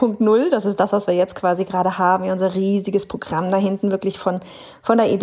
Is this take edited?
no; 0 cuts

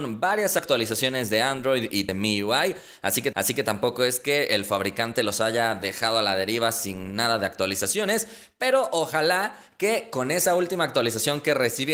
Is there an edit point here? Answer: yes; 1 cut; at 3.3 s

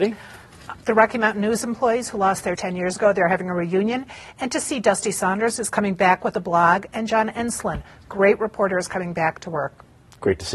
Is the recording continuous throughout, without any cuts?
no; 1 cut; at 2.6 s

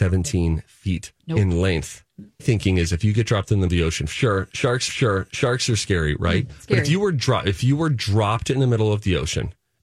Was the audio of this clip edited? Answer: yes; 4 cuts; at 1.2 s, 2.4 s, 3.7 s, 4.9 s

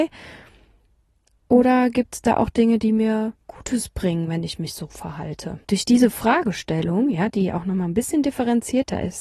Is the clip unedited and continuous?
no; 2 cuts; at 3.4 s, 5.6 s

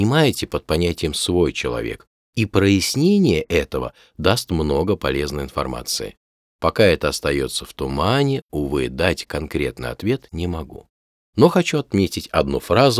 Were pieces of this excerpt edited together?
no; 0 cuts

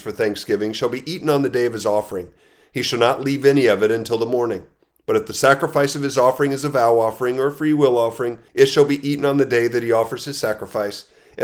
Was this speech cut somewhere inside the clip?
yes; 1 cut; at 8.5 s

